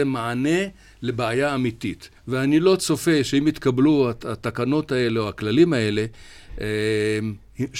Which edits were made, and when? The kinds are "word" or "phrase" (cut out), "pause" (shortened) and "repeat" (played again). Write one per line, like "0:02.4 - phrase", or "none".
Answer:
0:02.2 - pause